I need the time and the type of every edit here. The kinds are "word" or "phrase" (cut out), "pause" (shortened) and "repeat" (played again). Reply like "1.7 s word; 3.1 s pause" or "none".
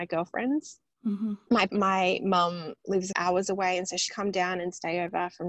1.7 s word; 3.1 s phrase; 4.1 s word